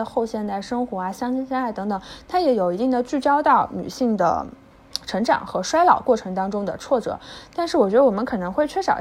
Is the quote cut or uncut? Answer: uncut